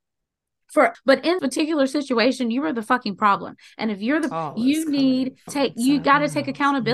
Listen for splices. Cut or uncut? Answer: cut